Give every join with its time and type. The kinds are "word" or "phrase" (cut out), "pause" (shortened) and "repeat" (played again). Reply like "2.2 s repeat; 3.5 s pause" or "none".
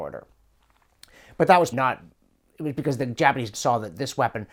1.7 s word; 3.5 s word